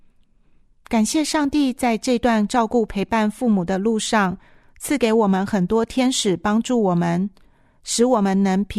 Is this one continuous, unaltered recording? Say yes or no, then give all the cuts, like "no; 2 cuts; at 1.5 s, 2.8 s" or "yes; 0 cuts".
yes; 0 cuts